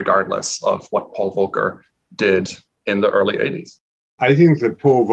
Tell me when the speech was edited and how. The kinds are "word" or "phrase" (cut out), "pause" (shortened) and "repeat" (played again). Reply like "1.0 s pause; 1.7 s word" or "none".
4.0 s pause